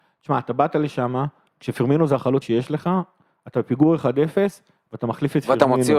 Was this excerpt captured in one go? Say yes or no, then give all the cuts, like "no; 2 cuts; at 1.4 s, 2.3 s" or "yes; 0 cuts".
no; 1 cut; at 2.4 s